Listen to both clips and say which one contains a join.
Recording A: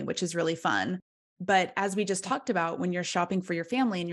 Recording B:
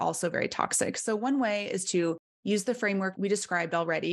B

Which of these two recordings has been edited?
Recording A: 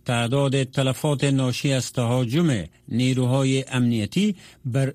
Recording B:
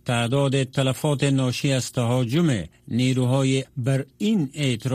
B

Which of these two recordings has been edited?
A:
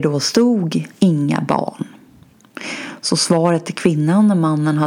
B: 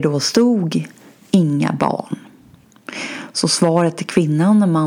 A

